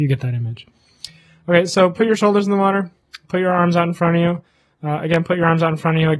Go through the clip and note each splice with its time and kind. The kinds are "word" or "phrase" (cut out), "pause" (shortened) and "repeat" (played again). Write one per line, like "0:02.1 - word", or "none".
none

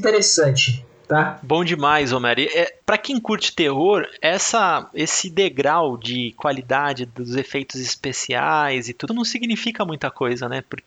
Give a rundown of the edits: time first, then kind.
0:02.8 - pause
0:09.1 - phrase

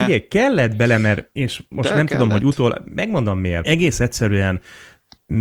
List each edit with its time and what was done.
none

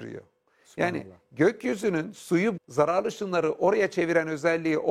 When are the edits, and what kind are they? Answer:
0:02.6 - word

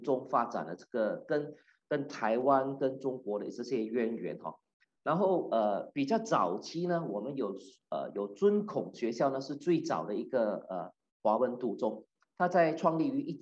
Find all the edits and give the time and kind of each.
none

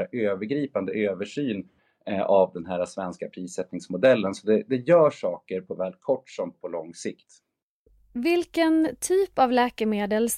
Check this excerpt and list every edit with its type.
0:06.5 - word

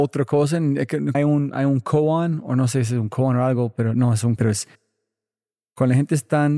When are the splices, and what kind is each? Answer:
0:01.1 - word
0:04.4 - word

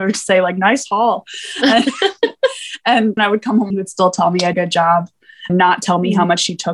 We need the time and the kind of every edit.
0:03.2 - word
0:03.7 - phrase
0:04.5 - phrase
0:05.5 - word

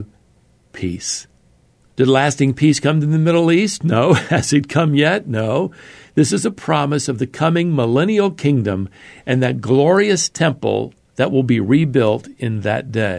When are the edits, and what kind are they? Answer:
none

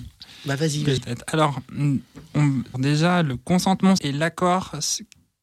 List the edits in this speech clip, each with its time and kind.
0:01.0 - word
0:02.7 - word
0:04.0 - word

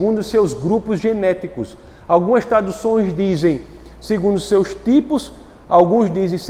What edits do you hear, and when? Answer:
none

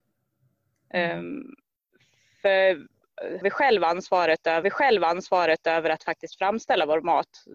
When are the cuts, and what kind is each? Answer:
0:03.4 - word
0:04.6 - repeat

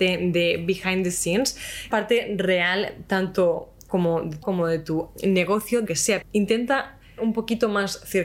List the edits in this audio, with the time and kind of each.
0:01.9 - word
0:03.9 - word
0:04.4 - word
0:05.2 - word
0:05.9 - word
0:06.2 - word
0:07.2 - word

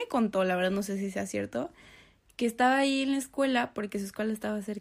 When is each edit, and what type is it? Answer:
none

